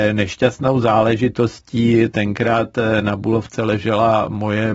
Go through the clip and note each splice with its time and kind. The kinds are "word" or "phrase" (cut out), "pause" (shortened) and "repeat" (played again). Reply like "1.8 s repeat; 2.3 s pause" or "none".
none